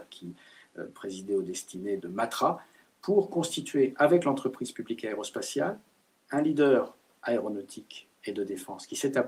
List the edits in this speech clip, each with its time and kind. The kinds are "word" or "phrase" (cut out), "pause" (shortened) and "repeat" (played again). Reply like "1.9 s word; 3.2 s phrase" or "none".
2.0 s word